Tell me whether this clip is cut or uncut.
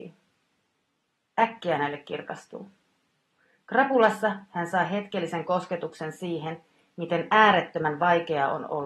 uncut